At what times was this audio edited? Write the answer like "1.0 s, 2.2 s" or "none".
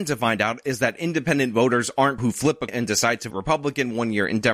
2.2 s, 2.7 s, 3.3 s